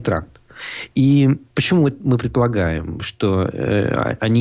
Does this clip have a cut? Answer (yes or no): no